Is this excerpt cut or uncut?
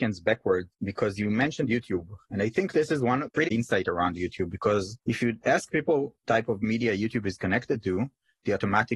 cut